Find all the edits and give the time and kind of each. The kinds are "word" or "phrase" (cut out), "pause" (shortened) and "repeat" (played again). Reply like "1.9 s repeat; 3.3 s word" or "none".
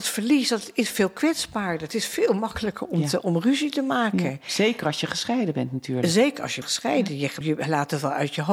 6.6 s word; 7.4 s word